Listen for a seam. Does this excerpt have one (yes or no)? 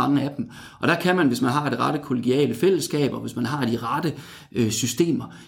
no